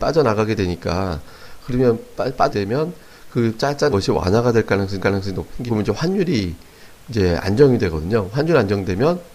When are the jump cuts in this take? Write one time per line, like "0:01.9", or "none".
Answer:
0:02.5
0:03.9
0:05.0
0:05.7